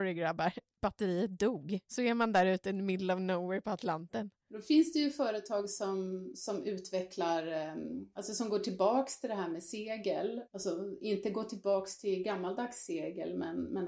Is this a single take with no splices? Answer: yes; 0 cuts

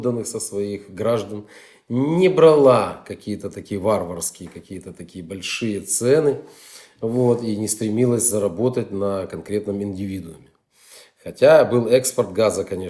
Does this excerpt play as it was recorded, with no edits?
yes; 0 cuts

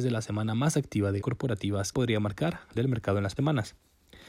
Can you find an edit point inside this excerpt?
yes; 4 cuts; at 1.2 s, 1.9 s, 2.8 s, 3.4 s

